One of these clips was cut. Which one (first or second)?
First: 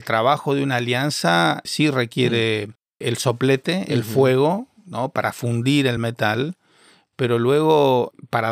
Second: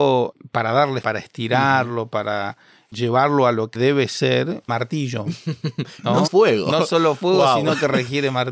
second